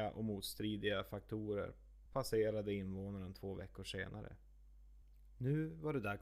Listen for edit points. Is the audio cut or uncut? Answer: uncut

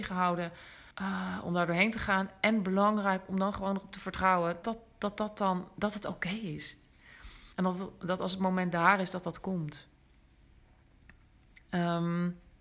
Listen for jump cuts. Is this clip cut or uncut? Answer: cut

